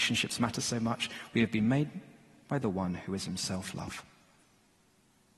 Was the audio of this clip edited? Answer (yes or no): no